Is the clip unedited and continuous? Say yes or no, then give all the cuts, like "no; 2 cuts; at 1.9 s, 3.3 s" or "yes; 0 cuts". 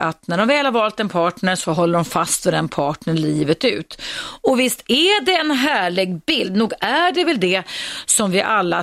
yes; 0 cuts